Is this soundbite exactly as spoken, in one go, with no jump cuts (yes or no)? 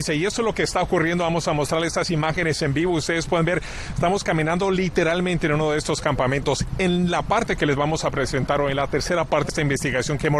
no